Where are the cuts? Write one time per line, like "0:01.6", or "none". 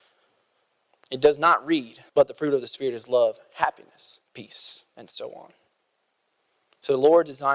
0:02.1
0:04.3